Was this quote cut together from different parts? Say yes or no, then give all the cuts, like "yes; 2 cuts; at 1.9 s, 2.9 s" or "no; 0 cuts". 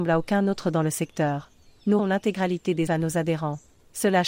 yes; 2 cuts; at 2.0 s, 2.9 s